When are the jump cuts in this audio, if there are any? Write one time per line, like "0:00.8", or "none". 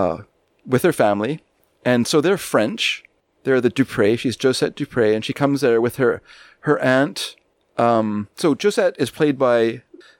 none